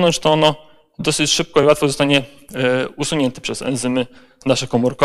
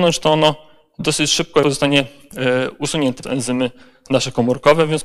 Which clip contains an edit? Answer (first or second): second